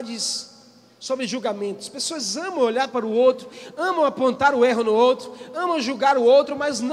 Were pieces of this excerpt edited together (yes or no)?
no